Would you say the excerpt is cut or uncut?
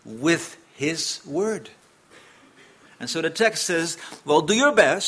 uncut